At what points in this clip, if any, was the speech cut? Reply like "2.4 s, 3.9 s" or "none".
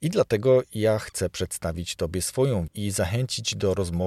2.7 s